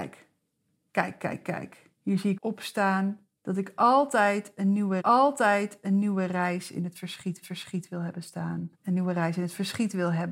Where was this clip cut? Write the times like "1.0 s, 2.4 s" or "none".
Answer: 2.0 s, 2.4 s, 3.4 s, 5.0 s, 7.4 s, 8.7 s